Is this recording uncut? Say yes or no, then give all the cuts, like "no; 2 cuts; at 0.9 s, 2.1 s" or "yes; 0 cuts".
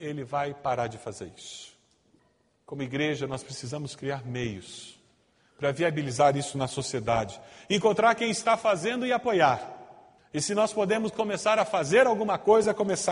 yes; 0 cuts